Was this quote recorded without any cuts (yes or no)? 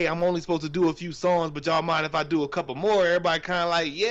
yes